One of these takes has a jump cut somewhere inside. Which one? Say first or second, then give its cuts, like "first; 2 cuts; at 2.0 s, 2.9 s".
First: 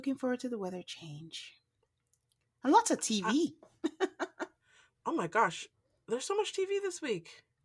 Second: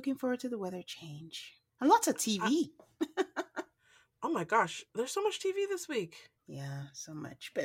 second; 3 cuts; at 1.7 s, 4.9 s, 6.4 s